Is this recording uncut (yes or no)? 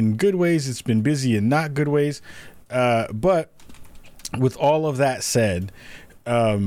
yes